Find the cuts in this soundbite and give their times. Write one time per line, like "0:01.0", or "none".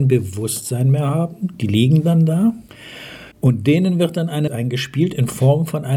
0:03.3
0:04.5